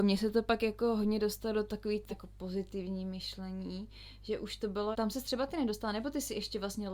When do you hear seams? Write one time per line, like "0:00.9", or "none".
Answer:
0:02.1
0:04.9